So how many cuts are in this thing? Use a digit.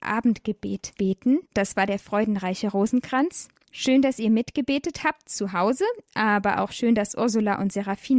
1